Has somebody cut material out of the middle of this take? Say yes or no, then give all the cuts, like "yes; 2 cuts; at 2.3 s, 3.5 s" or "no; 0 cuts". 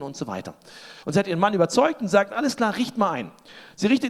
yes; 1 cut; at 1.0 s